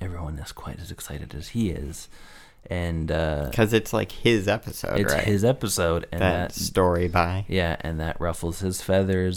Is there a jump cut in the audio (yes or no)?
no